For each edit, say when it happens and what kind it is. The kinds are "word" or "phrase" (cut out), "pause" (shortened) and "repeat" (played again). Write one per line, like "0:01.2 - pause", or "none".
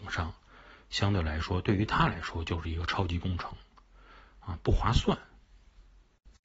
none